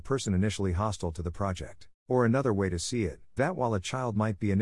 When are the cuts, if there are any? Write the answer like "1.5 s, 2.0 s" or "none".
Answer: 2.0 s, 3.4 s